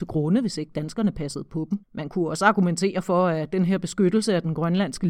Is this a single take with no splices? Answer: no; 1 cut; at 1.8 s

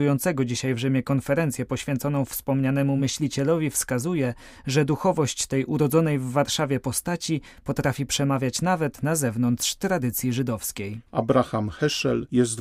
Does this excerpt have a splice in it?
no; 0 cuts

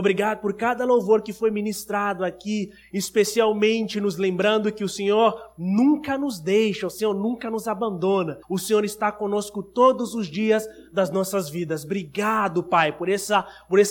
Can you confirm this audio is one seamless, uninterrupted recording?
no; 1 cut; at 8.4 s

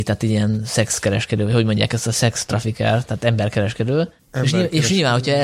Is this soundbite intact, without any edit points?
yes; 0 cuts

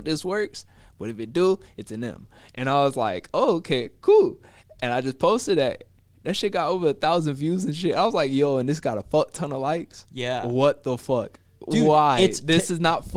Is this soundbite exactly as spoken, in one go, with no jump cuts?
yes; 0 cuts

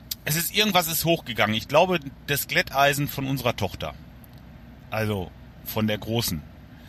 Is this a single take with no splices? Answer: yes; 0 cuts

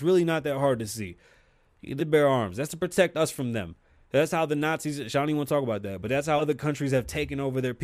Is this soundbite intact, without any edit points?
no; 2 cuts; at 2.0 s, 6.4 s

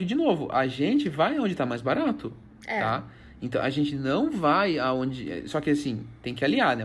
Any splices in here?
no; 0 cuts

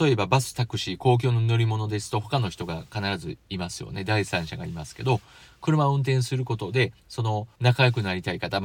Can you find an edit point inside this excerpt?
no; 0 cuts

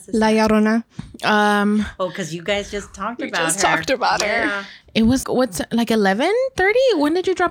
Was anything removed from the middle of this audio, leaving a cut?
yes; 1 cut; at 5.2 s

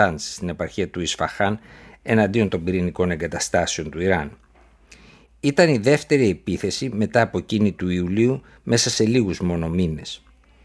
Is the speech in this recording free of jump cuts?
yes; 0 cuts

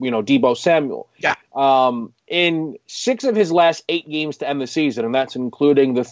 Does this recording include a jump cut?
no; 0 cuts

